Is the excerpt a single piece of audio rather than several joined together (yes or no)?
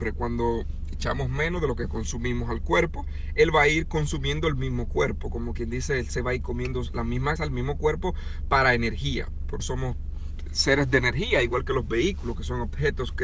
no